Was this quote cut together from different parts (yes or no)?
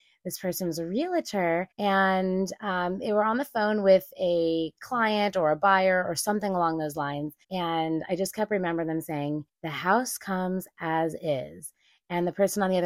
yes